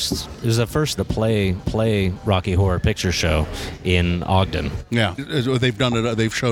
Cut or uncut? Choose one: cut